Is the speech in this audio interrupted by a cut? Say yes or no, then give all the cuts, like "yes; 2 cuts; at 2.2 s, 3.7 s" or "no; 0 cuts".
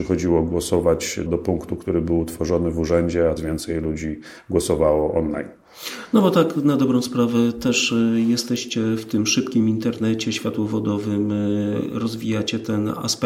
yes; 2 cuts; at 1.3 s, 3.4 s